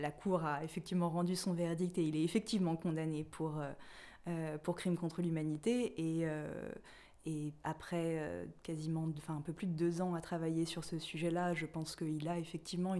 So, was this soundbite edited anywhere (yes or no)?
yes